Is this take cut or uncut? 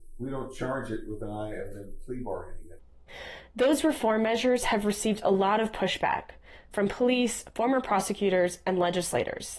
uncut